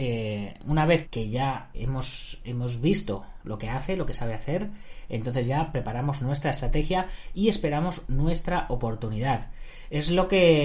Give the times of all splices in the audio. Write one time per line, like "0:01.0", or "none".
0:01.0
0:01.7